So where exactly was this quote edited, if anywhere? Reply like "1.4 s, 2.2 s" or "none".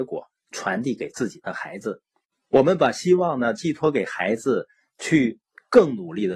none

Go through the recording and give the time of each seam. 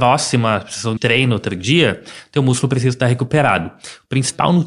1.0 s

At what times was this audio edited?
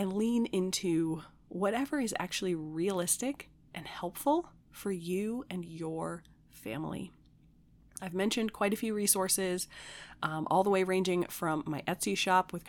none

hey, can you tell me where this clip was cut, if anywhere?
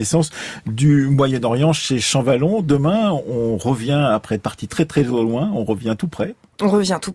none

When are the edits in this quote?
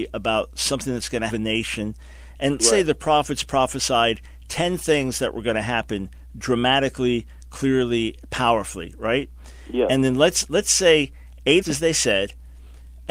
1.3 s, 2.6 s, 11.6 s

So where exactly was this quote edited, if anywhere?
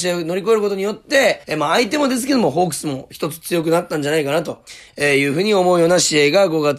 1.4 s

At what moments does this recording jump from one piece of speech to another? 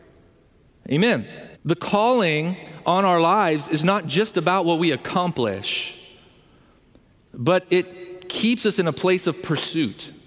1.5 s

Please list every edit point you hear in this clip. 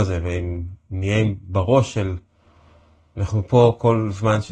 none

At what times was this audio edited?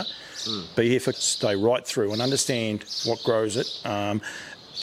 1.1 s

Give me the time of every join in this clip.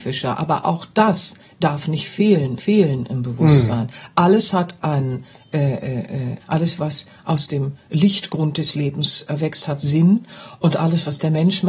2.6 s, 6.4 s

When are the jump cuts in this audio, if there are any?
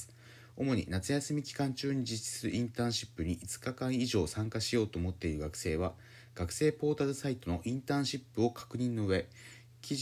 none

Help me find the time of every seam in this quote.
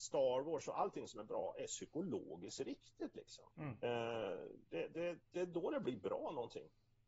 3.5 s

